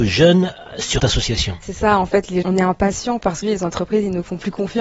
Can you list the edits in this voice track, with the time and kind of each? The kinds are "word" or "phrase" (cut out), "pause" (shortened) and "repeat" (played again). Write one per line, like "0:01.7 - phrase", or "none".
0:01.0 - word
0:01.6 - word
0:02.4 - word
0:03.4 - word